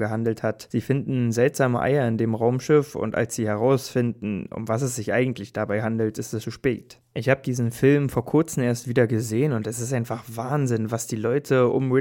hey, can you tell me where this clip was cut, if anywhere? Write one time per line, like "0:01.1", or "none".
0:06.4

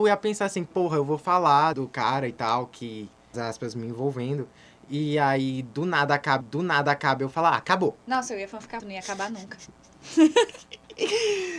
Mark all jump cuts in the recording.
0:01.7
0:03.3
0:06.4
0:08.8

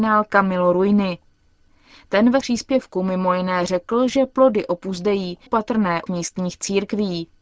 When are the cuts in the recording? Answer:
0:02.4
0:05.5
0:06.1

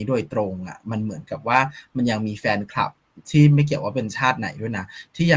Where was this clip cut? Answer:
0:03.2

